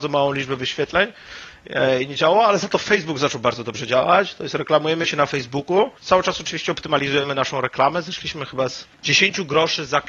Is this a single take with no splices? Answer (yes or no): no